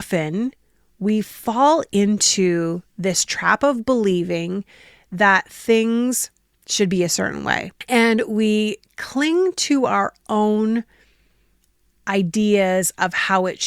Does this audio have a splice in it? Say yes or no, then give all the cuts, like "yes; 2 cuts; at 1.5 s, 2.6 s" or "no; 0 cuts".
no; 0 cuts